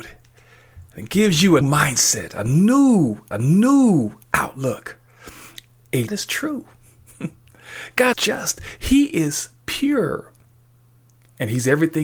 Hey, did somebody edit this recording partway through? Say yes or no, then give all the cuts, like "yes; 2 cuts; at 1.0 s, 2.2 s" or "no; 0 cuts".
yes; 4 cuts; at 1.6 s, 3.3 s, 6.1 s, 8.1 s